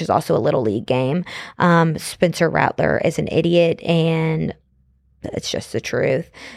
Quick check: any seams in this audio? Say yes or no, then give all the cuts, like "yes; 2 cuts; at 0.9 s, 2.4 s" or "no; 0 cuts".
no; 0 cuts